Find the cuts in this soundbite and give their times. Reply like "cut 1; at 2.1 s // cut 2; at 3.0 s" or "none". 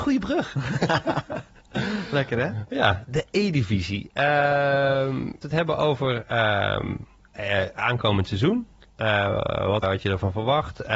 cut 1; at 3.1 s // cut 2; at 5.4 s // cut 3; at 9.8 s